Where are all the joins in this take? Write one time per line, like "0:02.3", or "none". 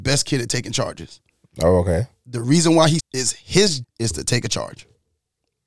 0:03.0
0:03.8

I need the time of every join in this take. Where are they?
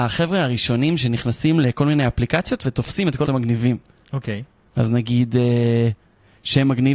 0:03.2
0:04.7

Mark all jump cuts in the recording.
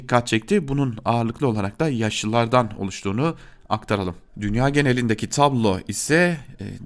0:04.3

